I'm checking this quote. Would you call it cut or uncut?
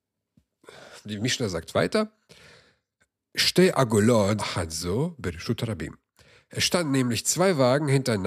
cut